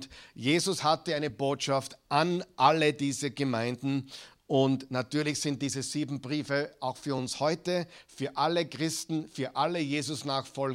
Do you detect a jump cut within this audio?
no; 0 cuts

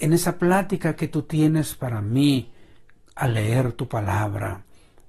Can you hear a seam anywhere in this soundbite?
no; 0 cuts

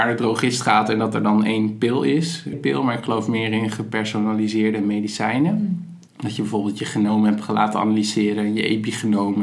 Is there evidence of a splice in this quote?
yes; 2 cuts; at 2.5 s, 6.1 s

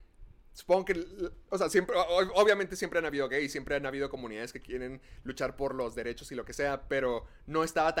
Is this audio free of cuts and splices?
yes; 0 cuts

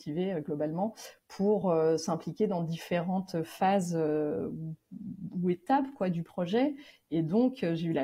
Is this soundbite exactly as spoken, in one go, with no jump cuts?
yes; 0 cuts

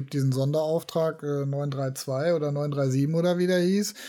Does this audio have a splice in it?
no; 0 cuts

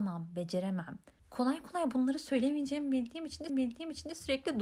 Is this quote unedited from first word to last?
no; 2 cuts; at 1.2 s, 3.5 s

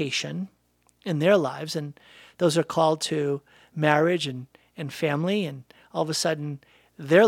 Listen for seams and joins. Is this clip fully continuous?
yes; 0 cuts

